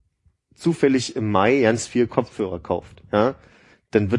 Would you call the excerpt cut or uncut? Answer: uncut